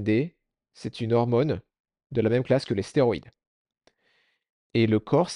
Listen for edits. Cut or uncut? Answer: uncut